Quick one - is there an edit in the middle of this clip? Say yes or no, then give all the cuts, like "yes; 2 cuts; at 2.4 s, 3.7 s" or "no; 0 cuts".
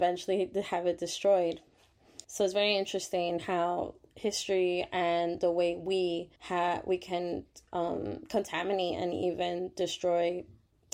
yes; 2 cuts; at 2.2 s, 6.4 s